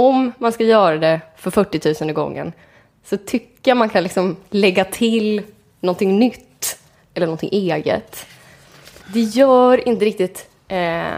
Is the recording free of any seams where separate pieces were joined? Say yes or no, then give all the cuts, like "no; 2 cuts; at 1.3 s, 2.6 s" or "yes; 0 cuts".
yes; 0 cuts